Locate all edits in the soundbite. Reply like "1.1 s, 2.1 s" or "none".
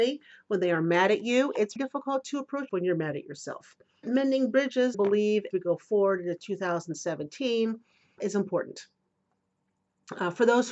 1.8 s, 2.7 s, 4.0 s, 4.9 s, 5.5 s, 8.2 s